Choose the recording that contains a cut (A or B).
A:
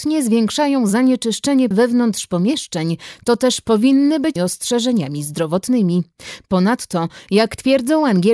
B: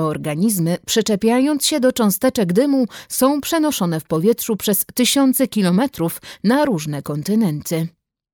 A